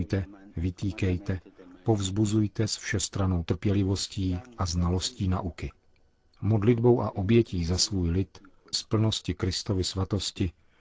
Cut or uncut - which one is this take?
cut